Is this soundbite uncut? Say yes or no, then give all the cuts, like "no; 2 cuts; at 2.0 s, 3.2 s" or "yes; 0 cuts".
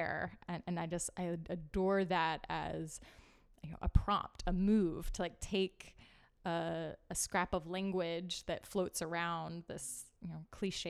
yes; 0 cuts